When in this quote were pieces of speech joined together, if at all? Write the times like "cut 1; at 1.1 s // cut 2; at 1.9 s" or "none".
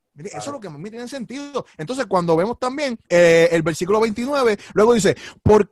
cut 1; at 3.0 s